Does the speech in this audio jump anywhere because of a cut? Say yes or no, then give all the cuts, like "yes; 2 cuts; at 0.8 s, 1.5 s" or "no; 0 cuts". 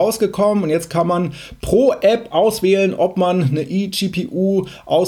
no; 0 cuts